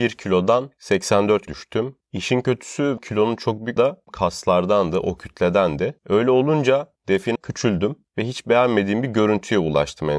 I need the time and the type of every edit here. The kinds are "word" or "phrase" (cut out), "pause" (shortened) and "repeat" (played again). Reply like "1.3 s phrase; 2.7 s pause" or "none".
1.5 s word; 3.0 s word; 3.8 s phrase; 4.1 s phrase; 6.0 s pause; 7.4 s phrase